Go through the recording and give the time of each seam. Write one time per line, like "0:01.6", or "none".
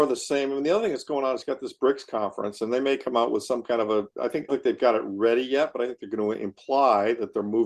0:04.5